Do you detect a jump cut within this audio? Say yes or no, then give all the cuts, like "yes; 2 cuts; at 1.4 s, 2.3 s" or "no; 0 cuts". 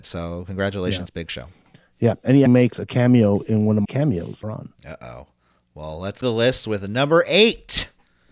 yes; 4 cuts; at 2.5 s, 3.8 s, 4.4 s, 6.2 s